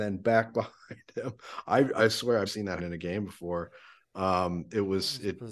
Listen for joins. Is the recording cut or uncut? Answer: cut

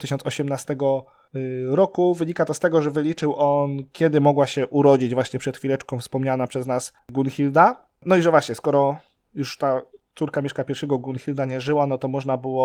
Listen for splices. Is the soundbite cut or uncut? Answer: uncut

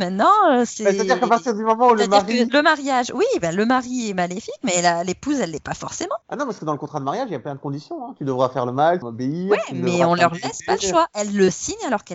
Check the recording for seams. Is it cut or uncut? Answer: cut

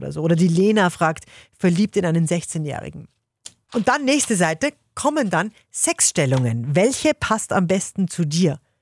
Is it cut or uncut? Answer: uncut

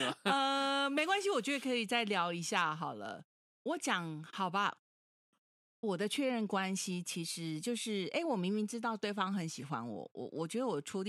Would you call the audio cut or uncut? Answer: cut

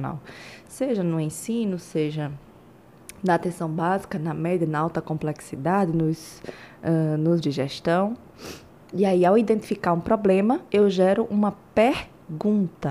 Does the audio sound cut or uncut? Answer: cut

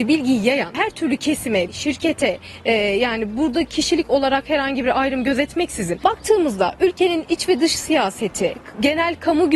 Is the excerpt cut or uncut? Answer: cut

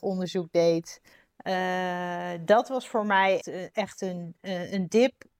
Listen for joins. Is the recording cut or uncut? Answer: cut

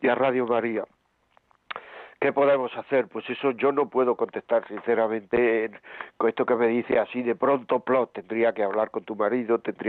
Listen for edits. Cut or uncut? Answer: uncut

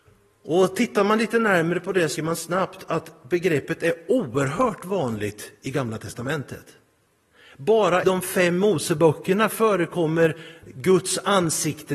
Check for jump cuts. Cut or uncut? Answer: cut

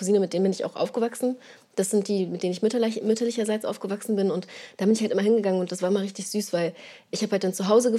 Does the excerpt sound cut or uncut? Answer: uncut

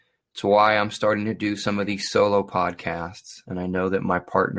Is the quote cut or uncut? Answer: uncut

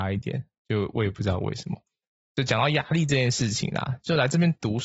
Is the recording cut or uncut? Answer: cut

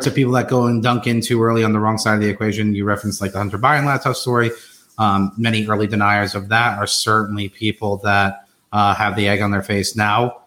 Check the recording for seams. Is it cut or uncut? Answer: uncut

